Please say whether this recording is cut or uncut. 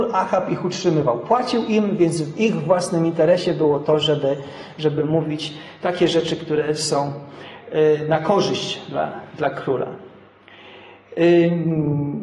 uncut